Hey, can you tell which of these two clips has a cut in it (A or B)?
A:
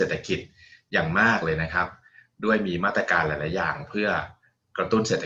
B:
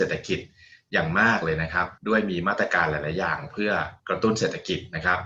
B